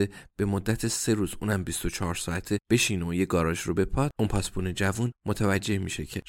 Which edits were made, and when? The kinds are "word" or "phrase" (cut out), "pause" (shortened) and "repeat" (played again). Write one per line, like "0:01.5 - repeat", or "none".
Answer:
none